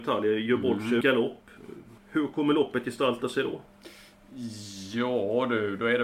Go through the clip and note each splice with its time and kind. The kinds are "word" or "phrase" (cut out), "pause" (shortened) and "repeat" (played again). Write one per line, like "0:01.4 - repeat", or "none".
0:01.0 - word
0:02.0 - pause